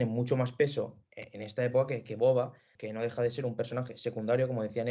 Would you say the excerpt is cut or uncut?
uncut